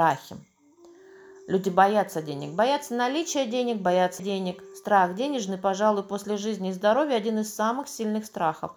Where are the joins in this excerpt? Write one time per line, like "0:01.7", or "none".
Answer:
0:04.2